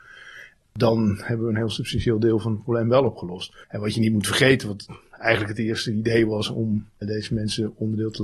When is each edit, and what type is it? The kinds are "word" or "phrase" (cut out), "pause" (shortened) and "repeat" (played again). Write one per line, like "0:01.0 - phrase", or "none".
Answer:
0:03.6 - pause
0:07.0 - word